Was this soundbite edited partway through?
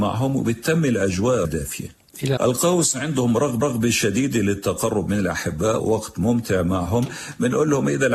yes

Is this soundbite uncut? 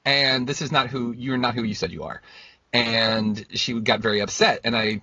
yes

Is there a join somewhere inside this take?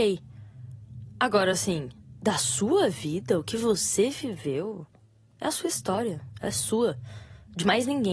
no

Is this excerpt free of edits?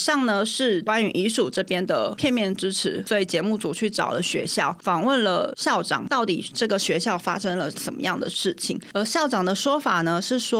yes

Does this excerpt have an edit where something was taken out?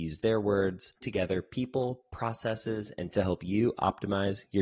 yes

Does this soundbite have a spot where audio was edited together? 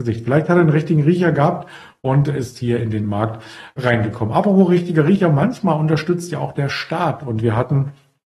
no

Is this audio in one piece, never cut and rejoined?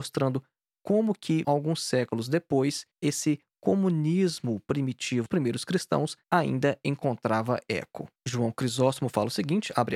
no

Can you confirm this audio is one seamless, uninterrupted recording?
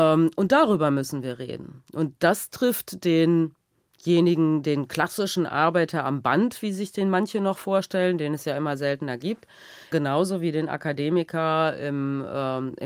no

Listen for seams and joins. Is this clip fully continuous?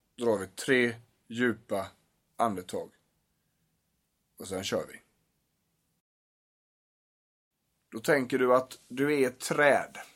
yes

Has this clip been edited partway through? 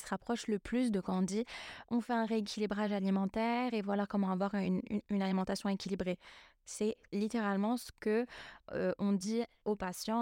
no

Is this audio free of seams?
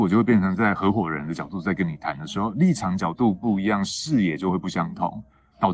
yes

